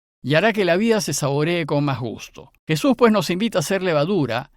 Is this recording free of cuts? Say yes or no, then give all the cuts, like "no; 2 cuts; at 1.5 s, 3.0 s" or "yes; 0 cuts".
no; 1 cut; at 2.6 s